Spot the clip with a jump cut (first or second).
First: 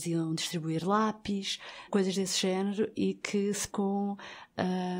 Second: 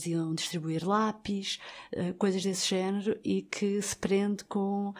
first